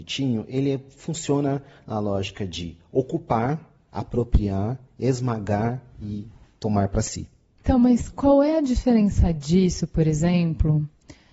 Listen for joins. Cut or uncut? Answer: uncut